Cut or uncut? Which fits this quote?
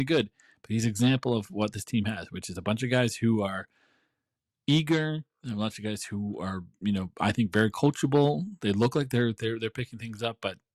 uncut